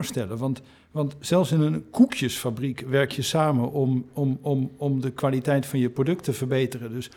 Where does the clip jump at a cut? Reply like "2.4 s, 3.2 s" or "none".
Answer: none